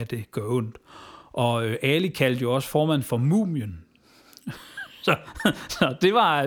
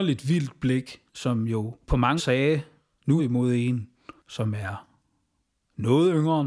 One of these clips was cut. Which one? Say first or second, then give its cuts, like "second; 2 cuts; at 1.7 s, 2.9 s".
second; 5 cuts; at 1.1 s, 1.8 s, 2.2 s, 3.2 s, 4.2 s